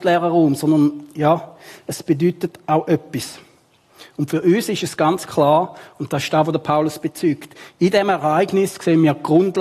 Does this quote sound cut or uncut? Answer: uncut